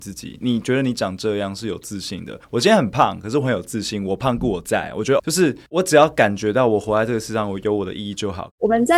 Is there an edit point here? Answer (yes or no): yes